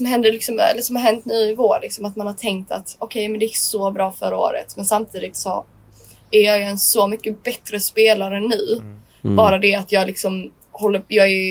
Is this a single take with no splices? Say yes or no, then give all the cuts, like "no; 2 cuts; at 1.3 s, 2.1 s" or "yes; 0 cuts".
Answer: yes; 0 cuts